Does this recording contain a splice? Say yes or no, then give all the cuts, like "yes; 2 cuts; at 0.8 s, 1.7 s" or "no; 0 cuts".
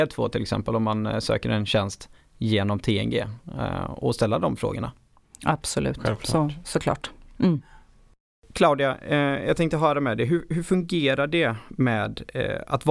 no; 0 cuts